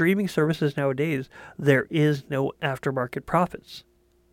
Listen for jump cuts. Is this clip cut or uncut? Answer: uncut